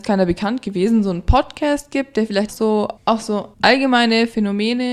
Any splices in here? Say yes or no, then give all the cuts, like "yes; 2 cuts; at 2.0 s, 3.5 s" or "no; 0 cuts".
yes; 3 cuts; at 2.5 s, 3.0 s, 3.5 s